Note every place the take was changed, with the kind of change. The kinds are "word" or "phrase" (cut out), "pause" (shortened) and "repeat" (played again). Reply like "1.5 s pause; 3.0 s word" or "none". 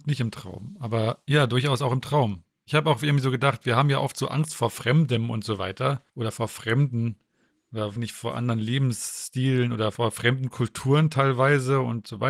6.1 s pause; 8.0 s word